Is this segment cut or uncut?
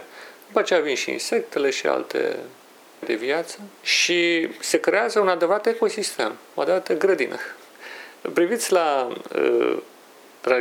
cut